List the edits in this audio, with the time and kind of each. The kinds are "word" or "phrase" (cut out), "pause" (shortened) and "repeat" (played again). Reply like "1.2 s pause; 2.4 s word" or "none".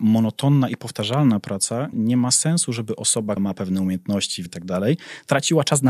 1.9 s word; 3.4 s word; 4.5 s word